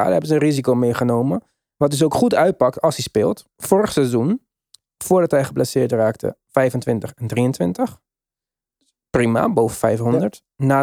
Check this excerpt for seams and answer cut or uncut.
uncut